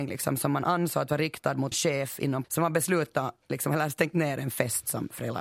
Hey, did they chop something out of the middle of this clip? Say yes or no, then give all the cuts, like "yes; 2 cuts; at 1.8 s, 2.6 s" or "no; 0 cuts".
yes; 2 cuts; at 1.7 s, 2.4 s